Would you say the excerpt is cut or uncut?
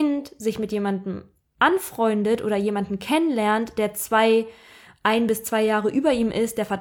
uncut